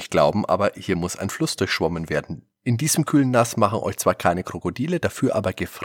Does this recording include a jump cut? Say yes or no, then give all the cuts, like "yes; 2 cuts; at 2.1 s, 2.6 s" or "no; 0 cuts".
yes; 1 cut; at 2.5 s